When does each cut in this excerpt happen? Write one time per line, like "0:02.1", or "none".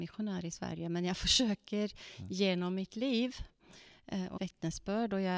0:04.4